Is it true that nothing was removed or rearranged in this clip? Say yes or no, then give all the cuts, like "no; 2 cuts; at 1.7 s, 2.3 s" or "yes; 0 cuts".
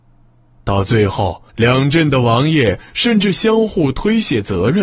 no; 1 cut; at 1.5 s